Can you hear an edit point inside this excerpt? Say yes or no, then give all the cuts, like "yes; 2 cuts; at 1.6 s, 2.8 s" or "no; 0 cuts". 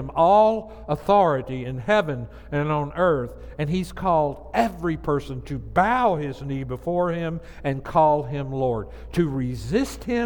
no; 0 cuts